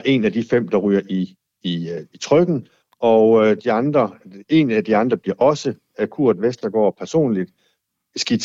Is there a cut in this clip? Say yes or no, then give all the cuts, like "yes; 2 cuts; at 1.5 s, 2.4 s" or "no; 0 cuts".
no; 0 cuts